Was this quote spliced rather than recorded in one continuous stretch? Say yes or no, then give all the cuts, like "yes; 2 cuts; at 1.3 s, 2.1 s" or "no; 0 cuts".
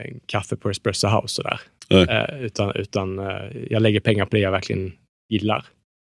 no; 0 cuts